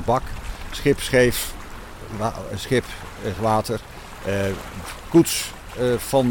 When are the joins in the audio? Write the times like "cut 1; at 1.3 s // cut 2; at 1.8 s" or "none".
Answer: cut 1; at 3.3 s